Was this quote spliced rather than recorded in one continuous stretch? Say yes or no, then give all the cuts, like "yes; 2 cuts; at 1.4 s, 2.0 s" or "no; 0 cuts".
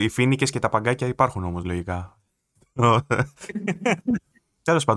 no; 0 cuts